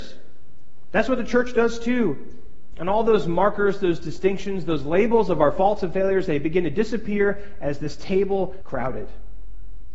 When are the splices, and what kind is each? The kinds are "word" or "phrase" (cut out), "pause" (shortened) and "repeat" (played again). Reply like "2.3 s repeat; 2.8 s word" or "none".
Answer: 8.6 s word

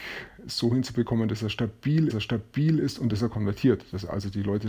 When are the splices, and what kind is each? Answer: 2.1 s repeat

